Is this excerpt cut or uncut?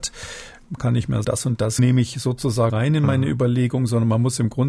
cut